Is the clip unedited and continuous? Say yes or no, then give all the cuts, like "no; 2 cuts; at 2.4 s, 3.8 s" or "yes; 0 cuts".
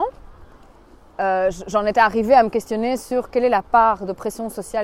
yes; 0 cuts